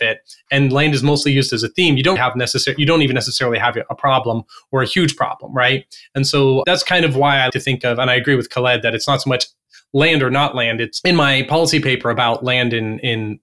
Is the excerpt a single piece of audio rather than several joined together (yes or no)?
no